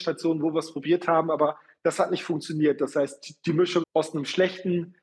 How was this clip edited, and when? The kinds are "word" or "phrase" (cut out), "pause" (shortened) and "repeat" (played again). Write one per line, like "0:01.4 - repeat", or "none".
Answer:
0:03.8 - word

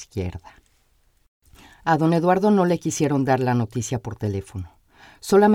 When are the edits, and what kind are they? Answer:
none

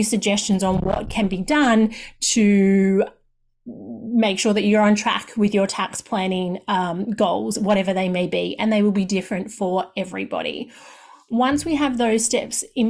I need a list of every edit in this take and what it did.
none

